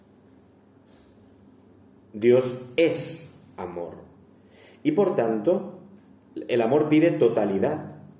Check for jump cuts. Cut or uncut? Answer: uncut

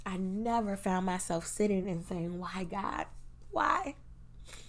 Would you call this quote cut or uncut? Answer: uncut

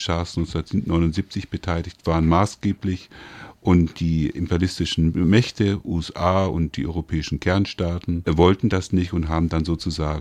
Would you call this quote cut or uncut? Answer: uncut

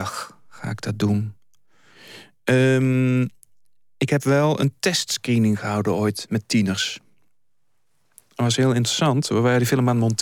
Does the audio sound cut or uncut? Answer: uncut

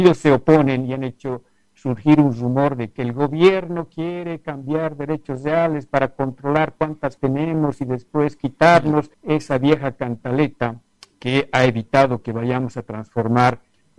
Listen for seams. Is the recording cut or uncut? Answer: cut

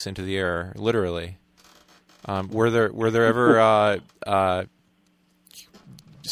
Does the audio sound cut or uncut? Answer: uncut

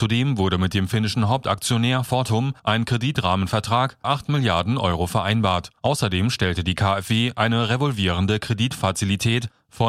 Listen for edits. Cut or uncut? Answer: cut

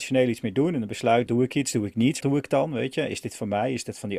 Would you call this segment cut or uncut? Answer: cut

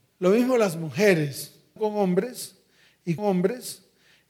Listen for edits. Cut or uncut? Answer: cut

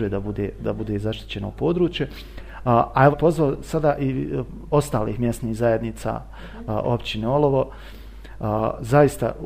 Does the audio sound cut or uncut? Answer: cut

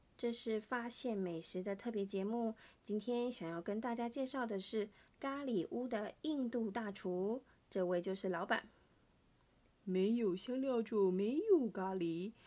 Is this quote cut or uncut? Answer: uncut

